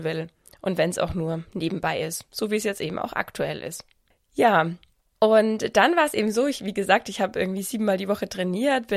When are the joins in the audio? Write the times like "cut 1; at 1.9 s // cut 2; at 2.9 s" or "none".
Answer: none